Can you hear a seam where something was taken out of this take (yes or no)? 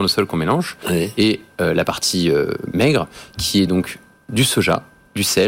no